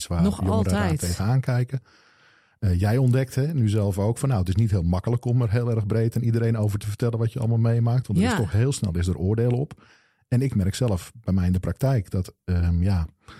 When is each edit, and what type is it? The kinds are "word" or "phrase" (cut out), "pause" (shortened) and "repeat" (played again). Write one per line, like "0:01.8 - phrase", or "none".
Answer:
none